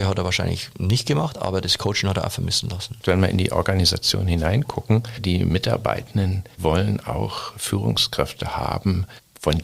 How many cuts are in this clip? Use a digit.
1